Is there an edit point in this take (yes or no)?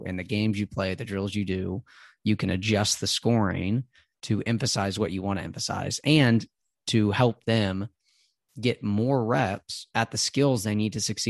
no